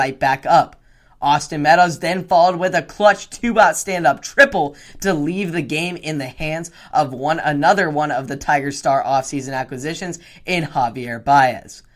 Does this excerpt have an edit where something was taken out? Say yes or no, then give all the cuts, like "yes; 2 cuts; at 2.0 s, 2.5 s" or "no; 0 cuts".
no; 0 cuts